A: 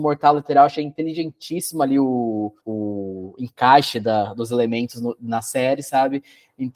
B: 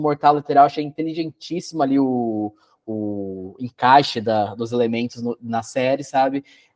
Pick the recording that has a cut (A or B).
A